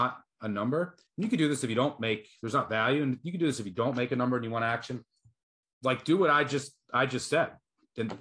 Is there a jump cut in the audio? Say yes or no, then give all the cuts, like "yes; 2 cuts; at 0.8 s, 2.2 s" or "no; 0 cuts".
yes; 1 cut; at 1.1 s